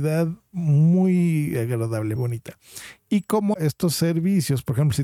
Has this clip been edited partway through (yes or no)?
yes